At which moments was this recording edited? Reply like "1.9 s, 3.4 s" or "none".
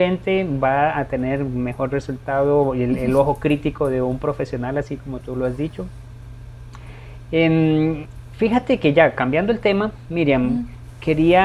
none